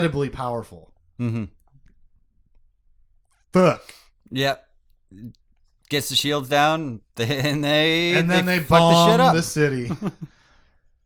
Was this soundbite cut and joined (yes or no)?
no